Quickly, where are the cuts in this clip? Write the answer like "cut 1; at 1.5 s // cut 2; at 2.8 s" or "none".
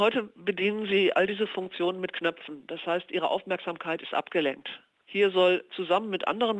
none